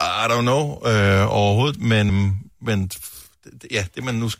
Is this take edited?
yes; 1 cut; at 2.1 s

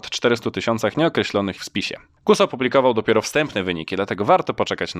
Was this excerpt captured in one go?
no; 1 cut; at 1.6 s

